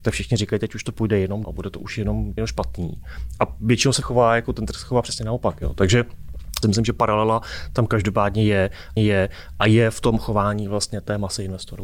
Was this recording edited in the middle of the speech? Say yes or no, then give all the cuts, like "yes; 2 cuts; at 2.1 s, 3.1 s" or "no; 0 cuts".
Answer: yes; 5 cuts; at 1.4 s, 2.4 s, 4.0 s, 6.6 s, 9.0 s